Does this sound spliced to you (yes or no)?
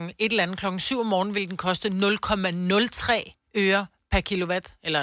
yes